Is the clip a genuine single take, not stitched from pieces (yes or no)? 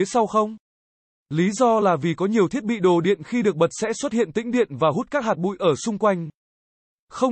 yes